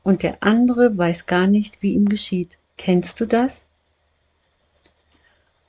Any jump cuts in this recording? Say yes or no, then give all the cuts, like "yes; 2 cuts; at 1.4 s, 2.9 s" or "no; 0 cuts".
yes; 1 cut; at 2.6 s